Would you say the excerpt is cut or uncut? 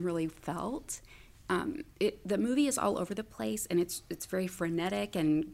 cut